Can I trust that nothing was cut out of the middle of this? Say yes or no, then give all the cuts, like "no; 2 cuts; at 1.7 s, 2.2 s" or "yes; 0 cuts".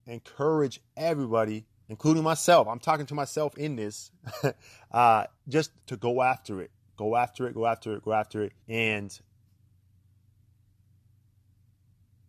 no; 3 cuts; at 1.7 s, 5.8 s, 8.6 s